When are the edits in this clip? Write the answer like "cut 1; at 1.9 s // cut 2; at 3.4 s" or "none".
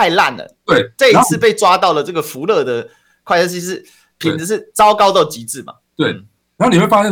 none